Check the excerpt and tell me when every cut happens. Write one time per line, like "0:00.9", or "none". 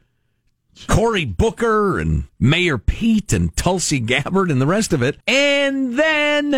0:02.3
0:05.2